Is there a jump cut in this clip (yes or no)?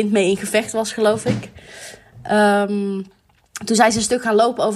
no